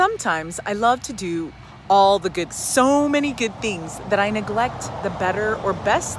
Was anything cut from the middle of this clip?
yes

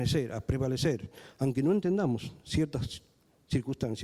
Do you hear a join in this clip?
no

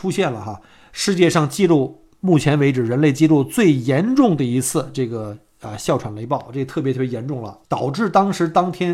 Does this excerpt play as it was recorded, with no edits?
no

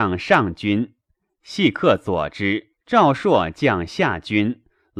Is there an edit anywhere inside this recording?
yes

